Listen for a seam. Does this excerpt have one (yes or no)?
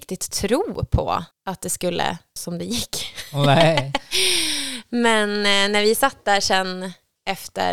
yes